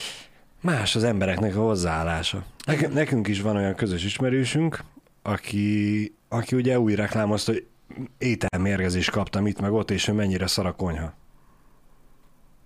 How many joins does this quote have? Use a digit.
2